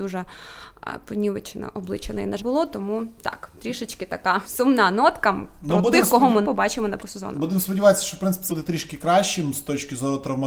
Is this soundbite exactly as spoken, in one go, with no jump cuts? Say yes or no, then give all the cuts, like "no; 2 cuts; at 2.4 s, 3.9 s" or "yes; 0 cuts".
no; 5 cuts; at 2.4 s, 4.4 s, 6.4 s, 7.0 s, 8.5 s